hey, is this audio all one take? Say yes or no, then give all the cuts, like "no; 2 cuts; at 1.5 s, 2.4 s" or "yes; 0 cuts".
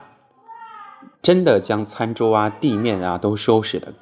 no; 1 cut; at 1.1 s